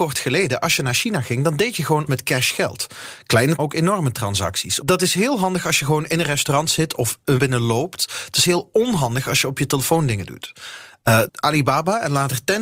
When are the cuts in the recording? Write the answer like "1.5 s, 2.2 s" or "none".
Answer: 2.1 s, 3.6 s, 7.4 s, 11.3 s